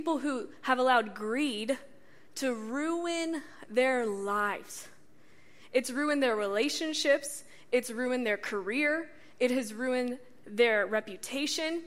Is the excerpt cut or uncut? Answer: uncut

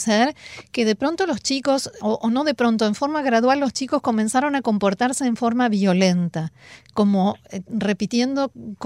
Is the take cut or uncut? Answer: uncut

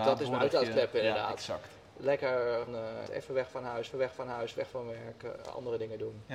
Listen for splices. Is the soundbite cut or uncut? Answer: cut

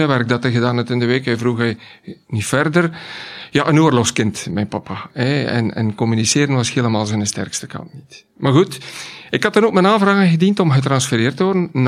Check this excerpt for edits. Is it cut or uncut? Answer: uncut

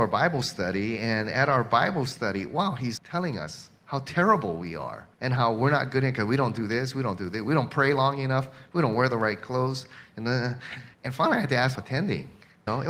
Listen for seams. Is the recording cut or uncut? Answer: cut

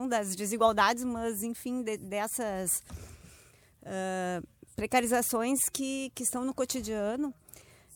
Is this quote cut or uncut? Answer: uncut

